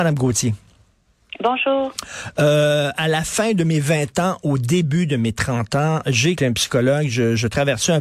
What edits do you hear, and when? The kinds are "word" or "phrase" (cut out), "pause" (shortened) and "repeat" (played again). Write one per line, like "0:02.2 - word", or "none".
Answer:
0:06.4 - word